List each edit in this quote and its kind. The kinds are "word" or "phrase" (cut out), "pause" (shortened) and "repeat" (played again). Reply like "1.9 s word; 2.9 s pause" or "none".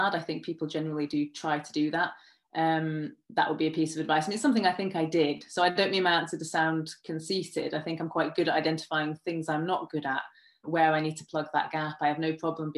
10.6 s word